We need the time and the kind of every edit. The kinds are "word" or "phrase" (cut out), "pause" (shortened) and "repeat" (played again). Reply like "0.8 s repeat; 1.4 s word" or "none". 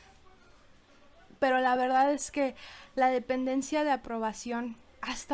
none